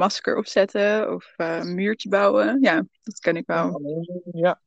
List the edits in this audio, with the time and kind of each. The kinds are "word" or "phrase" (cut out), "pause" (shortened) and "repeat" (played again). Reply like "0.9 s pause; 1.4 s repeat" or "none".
none